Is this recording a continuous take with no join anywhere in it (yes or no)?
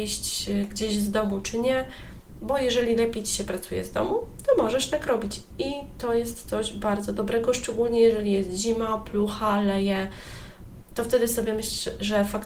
yes